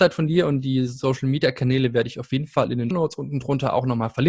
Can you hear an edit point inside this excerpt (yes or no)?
yes